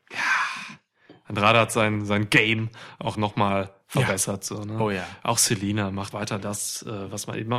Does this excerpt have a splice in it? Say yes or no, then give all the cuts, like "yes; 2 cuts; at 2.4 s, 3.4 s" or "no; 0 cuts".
yes; 2 cuts; at 3.1 s, 6.1 s